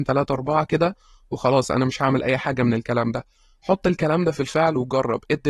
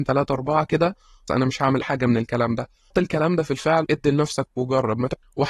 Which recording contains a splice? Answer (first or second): second